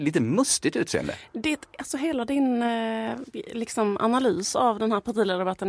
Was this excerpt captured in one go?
yes; 0 cuts

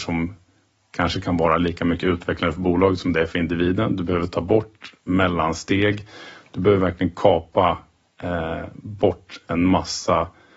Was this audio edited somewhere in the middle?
no; 0 cuts

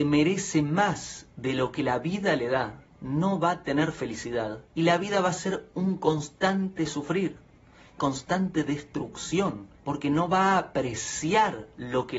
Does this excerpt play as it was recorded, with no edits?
no; 4 cuts; at 2.9 s, 4.7 s, 8.0 s, 9.7 s

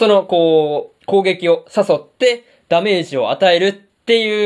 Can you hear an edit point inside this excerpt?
no; 0 cuts

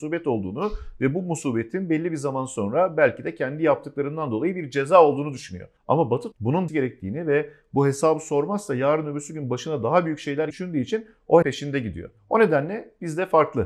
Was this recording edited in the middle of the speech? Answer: yes; 6 cuts; at 5.8 s, 6.3 s, 6.7 s, 10.5 s, 11.4 s, 12.2 s

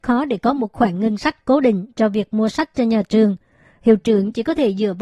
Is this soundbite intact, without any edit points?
yes; 0 cuts

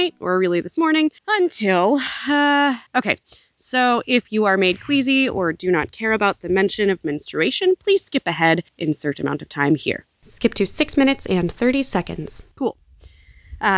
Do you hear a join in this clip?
yes; 4 cuts; at 1.2 s, 2.9 s, 8.7 s, 12.5 s

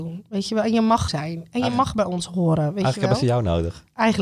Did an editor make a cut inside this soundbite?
yes; 1 cut; at 1.1 s

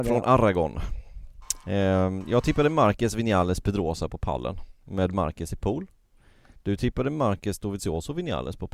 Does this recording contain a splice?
no; 0 cuts

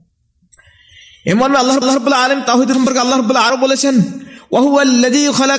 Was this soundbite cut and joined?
yes; 3 cuts; at 1.8 s, 2.7 s, 3.5 s

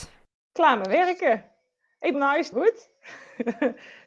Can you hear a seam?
yes; 2 cuts; at 2.1 s, 2.5 s

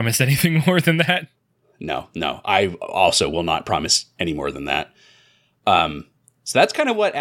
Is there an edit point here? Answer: no; 0 cuts

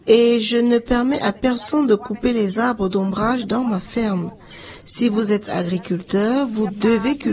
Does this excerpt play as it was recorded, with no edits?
yes; 0 cuts

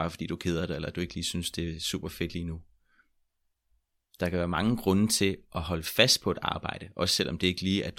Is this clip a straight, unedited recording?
yes; 0 cuts

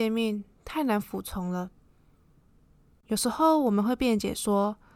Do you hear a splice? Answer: no; 0 cuts

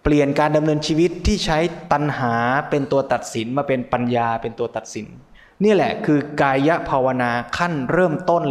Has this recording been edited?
yes; 1 cut; at 5.3 s

